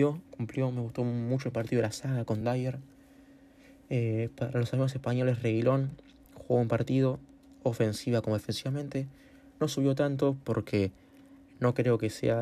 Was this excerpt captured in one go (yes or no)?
yes